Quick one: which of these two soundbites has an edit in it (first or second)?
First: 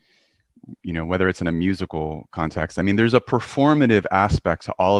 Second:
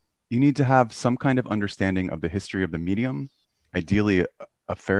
second